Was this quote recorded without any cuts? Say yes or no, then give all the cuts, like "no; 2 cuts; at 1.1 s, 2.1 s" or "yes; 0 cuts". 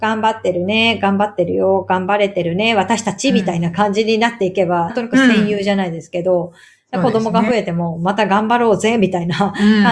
no; 1 cut; at 4.9 s